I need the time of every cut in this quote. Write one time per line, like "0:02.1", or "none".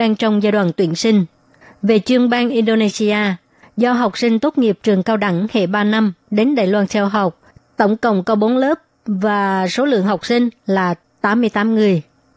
none